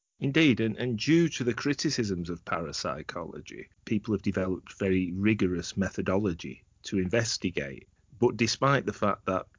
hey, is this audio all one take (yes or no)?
no